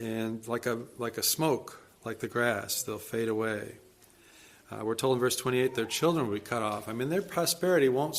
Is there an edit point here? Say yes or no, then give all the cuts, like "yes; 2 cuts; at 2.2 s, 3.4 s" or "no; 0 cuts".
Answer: no; 0 cuts